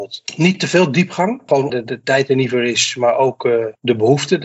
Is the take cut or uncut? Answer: cut